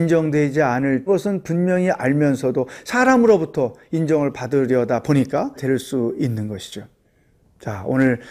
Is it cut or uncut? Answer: cut